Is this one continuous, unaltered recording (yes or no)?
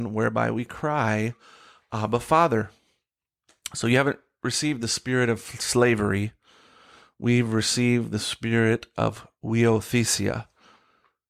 yes